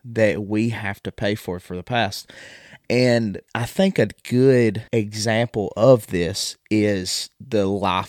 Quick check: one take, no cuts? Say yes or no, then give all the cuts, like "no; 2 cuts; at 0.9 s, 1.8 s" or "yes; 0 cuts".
no; 2 cuts; at 3.5 s, 4.9 s